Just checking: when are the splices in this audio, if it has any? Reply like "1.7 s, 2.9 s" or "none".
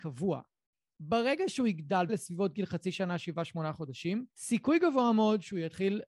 2.1 s, 4.3 s